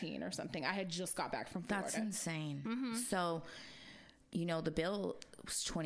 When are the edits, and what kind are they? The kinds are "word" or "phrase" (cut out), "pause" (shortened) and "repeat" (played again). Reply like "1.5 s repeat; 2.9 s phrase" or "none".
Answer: none